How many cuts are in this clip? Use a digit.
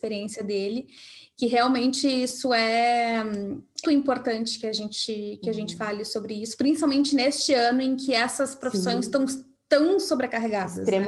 1